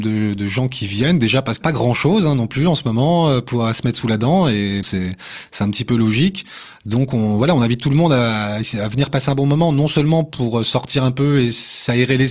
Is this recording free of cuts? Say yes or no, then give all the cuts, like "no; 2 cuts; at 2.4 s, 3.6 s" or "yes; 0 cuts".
no; 2 cuts; at 1.6 s, 4.8 s